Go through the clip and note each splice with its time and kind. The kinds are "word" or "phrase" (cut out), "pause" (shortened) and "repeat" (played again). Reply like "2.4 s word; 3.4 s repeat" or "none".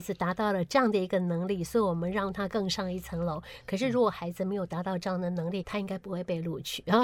5.6 s word